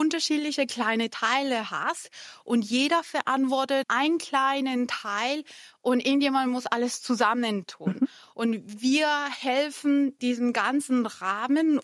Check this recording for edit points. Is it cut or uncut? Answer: cut